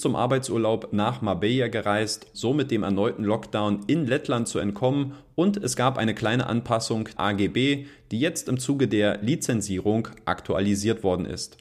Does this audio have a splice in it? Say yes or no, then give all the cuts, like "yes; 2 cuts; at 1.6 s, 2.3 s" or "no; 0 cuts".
yes; 2 cuts; at 2.3 s, 7.2 s